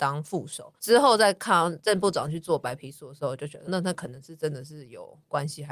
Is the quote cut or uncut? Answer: cut